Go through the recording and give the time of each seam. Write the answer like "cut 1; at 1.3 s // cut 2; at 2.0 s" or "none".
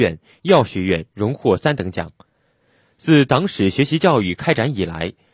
none